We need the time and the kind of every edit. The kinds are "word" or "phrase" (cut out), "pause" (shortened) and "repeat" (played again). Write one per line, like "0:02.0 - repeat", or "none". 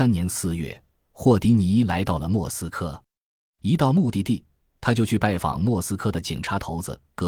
none